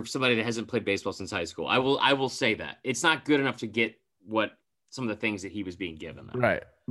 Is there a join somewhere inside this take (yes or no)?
no